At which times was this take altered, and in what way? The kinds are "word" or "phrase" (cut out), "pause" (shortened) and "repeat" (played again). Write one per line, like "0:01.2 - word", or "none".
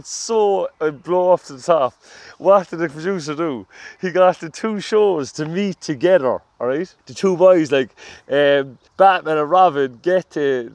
0:07.0 - pause
0:08.9 - pause